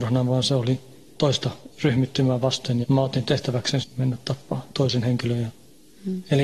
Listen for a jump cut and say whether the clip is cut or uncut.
cut